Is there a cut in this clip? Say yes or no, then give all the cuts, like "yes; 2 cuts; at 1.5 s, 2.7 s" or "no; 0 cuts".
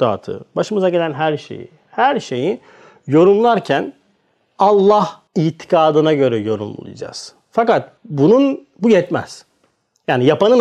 yes; 2 cuts; at 5.3 s, 8.0 s